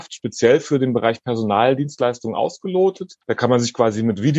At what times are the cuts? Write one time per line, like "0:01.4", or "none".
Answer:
0:03.2